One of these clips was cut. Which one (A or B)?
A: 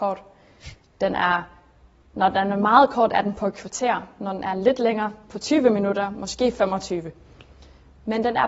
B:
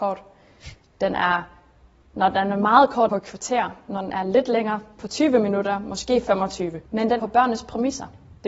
B